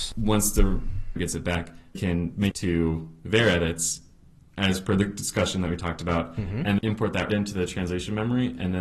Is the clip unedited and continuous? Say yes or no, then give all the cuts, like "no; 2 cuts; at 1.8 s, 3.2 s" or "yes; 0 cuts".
no; 5 cuts; at 1.2 s, 2.0 s, 2.5 s, 6.8 s, 7.3 s